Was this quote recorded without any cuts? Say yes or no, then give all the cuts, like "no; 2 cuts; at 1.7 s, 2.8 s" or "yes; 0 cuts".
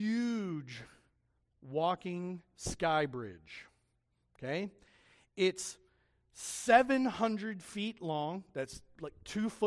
yes; 0 cuts